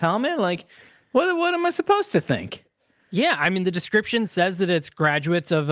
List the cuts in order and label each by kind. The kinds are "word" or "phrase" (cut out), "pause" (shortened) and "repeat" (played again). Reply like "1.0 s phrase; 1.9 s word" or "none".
none